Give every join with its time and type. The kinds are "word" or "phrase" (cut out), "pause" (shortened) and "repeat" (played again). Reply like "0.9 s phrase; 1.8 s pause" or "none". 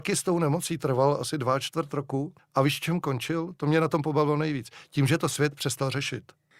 2.4 s pause